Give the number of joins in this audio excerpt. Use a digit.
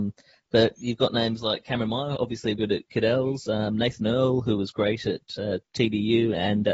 2